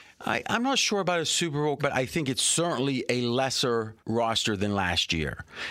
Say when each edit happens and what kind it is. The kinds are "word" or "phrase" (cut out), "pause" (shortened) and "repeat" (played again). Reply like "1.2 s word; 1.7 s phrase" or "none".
1.8 s word; 4.0 s pause